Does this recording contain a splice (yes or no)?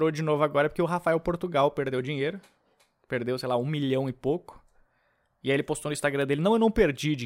no